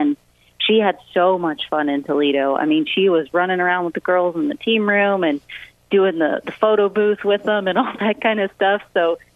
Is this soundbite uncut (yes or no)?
yes